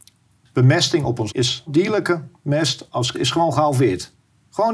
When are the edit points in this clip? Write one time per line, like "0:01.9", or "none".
0:01.3
0:01.7
0:03.1